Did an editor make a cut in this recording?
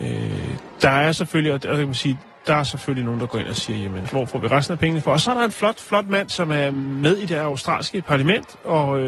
yes; 2 cuts; at 4.0 s, 6.3 s

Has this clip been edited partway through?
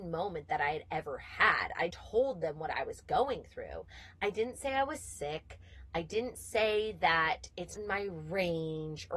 yes; 2 cuts; at 1.9 s, 7.7 s

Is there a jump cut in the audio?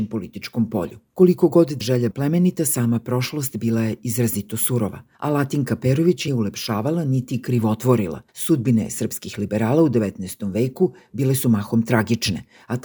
yes; 6 cuts; at 1.1 s, 1.8 s, 2.1 s, 5.1 s, 6.3 s, 8.3 s

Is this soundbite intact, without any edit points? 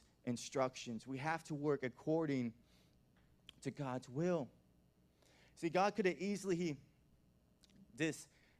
yes; 0 cuts

